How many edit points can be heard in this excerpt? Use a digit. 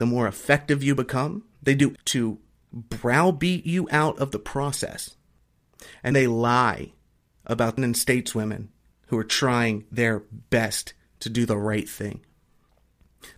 4